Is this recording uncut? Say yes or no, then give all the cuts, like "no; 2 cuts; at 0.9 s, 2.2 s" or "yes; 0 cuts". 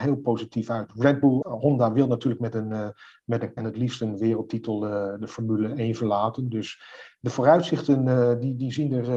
no; 3 cuts; at 1.4 s, 2.4 s, 3.6 s